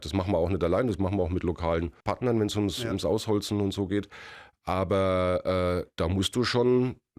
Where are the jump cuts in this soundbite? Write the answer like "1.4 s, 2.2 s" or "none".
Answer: 2.0 s